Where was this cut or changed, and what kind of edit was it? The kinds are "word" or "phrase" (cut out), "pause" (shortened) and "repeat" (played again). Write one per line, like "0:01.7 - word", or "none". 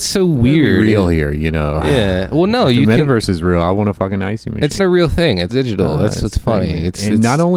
0:04.8 - word
0:05.5 - word